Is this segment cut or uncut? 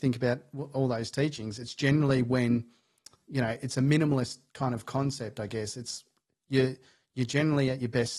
uncut